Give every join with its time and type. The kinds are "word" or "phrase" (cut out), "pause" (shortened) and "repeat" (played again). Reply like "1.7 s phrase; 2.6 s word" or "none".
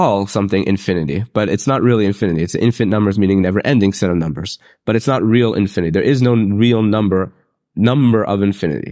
none